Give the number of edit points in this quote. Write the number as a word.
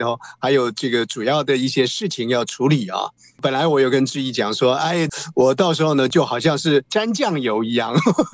zero